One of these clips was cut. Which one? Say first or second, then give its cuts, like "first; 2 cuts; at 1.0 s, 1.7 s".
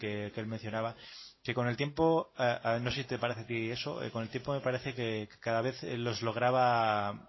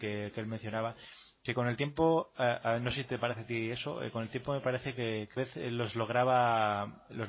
second; 1 cut; at 5.4 s